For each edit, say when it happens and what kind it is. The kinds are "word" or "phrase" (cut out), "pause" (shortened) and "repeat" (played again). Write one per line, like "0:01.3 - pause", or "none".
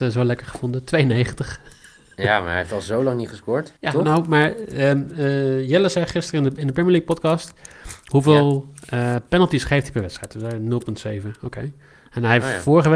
0:03.8 - pause